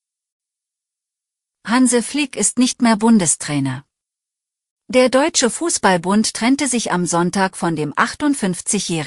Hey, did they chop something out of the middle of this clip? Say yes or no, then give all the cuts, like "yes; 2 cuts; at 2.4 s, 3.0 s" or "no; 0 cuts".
no; 0 cuts